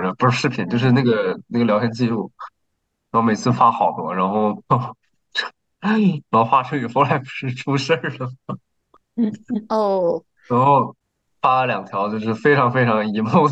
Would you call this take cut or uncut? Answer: cut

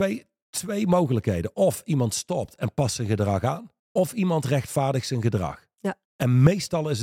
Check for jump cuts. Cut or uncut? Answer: cut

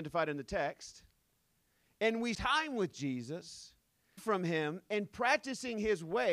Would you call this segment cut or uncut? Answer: cut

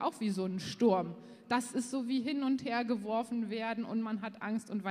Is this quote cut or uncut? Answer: uncut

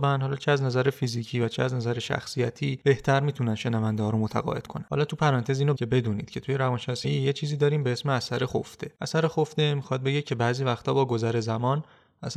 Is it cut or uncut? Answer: cut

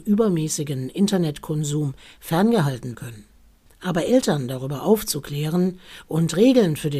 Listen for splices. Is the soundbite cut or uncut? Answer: cut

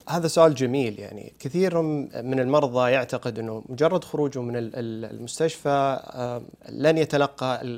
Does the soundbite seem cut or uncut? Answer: uncut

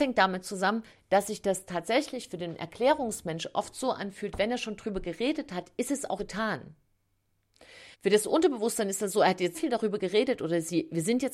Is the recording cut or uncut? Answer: cut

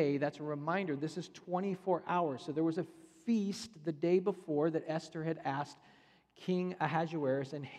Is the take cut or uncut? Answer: uncut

